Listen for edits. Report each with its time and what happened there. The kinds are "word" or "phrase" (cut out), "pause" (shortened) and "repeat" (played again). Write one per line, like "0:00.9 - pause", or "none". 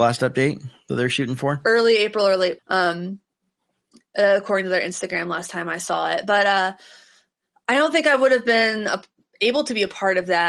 0:02.6 - word